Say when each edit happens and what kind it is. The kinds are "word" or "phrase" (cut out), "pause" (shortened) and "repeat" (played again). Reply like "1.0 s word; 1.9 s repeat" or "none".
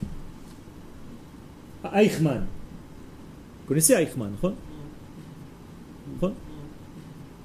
1.8 s pause; 6.2 s repeat